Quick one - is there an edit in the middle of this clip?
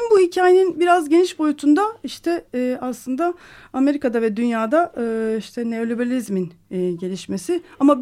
no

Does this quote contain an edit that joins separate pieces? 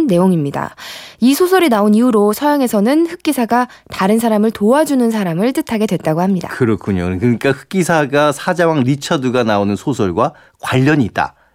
no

